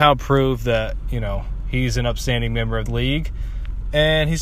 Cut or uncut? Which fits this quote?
cut